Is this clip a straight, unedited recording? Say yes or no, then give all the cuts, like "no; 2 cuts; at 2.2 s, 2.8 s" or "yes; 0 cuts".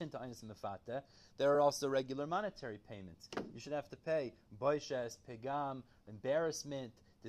yes; 0 cuts